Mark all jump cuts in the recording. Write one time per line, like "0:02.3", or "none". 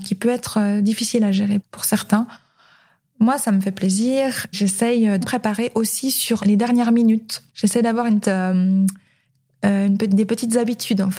0:01.6
0:04.5
0:05.2
0:06.4
0:07.5
0:08.2